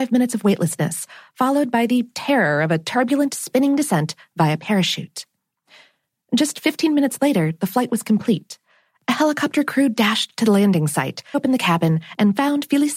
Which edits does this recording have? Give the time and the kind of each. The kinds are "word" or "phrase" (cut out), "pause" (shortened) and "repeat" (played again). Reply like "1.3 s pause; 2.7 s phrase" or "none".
11.3 s word